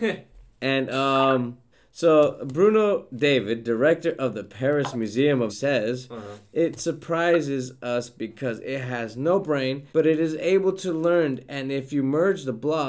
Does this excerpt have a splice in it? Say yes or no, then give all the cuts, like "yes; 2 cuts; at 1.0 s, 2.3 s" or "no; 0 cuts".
yes; 3 cuts; at 1.7 s, 5.5 s, 9.9 s